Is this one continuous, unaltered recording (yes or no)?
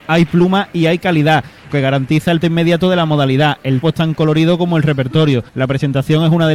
no